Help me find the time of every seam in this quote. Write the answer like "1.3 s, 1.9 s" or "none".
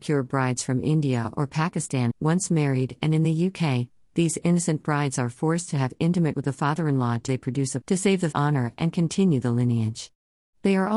2.1 s, 6.3 s, 7.3 s, 7.8 s, 8.3 s